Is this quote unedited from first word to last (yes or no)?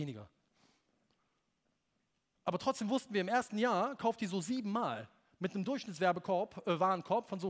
yes